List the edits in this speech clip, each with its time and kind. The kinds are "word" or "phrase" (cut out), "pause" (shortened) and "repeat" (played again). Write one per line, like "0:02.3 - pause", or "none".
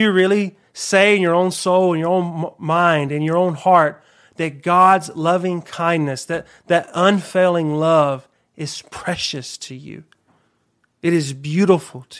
none